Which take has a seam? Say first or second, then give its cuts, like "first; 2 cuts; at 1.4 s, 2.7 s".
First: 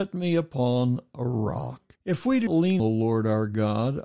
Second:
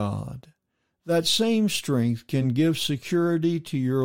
first; 3 cuts; at 2.0 s, 2.5 s, 2.8 s